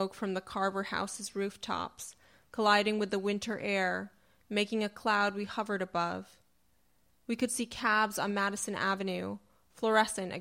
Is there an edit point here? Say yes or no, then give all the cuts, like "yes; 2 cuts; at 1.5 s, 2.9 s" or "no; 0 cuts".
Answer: no; 0 cuts